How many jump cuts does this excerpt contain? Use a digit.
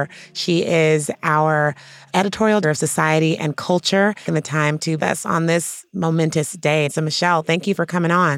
3